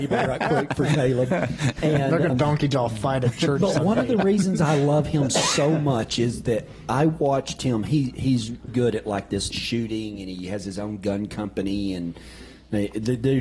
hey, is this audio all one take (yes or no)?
no